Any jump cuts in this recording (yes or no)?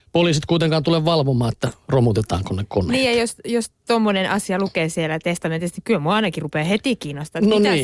no